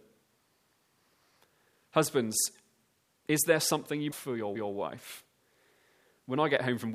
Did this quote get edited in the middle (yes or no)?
yes